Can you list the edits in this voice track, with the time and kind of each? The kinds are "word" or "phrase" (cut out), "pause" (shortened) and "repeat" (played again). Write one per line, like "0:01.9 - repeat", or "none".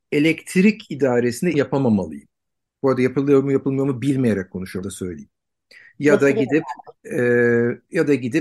0:01.5 - word
0:02.7 - pause
0:04.8 - word
0:07.0 - pause